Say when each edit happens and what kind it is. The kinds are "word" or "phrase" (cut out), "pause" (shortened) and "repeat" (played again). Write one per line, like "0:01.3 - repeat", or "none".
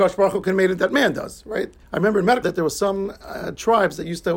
0:01.8 - pause
0:02.4 - phrase